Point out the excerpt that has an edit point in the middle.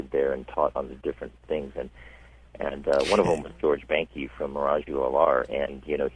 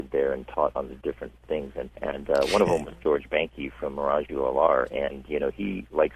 second; 1 cut; at 2.0 s

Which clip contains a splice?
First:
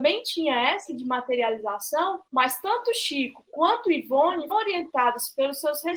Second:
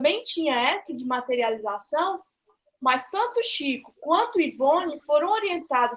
first; 2 cuts; at 2.3 s, 4.5 s

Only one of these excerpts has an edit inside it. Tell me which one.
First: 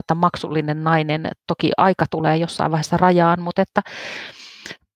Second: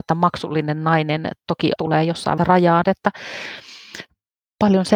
second; 3 cuts; at 1.8 s, 2.4 s, 2.8 s

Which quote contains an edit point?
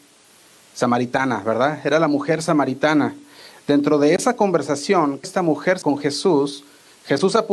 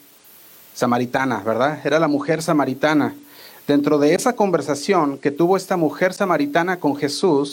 first; 2 cuts; at 5.2 s, 5.8 s

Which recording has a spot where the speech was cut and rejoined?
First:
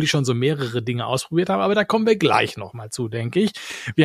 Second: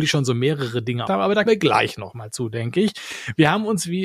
second; 2 cuts; at 1.1 s, 1.5 s

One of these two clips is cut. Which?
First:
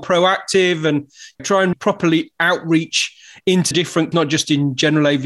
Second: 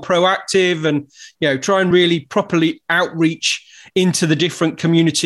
first; 4 cuts; at 1.4 s, 1.7 s, 3.7 s, 4.1 s

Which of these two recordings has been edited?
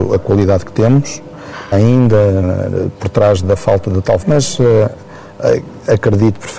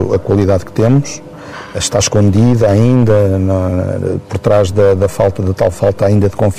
first; 4 cuts; at 1.7 s, 2.4 s, 3.4 s, 4.2 s

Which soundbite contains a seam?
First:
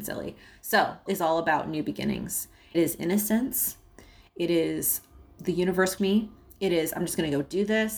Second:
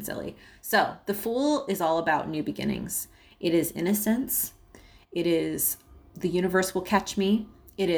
first; 3 cuts; at 1.1 s, 2.7 s, 6.0 s

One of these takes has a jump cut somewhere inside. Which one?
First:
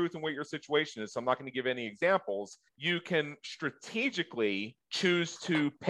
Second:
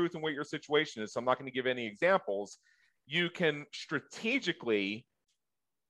first; 2 cuts; at 2.7 s, 4.8 s

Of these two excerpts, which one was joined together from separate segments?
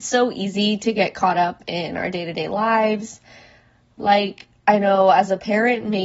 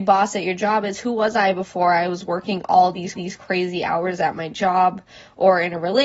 second; 1 cut; at 3.1 s

